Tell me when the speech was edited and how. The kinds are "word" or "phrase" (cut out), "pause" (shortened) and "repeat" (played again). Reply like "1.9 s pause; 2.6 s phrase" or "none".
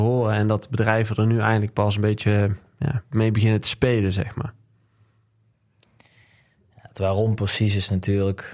3.1 s word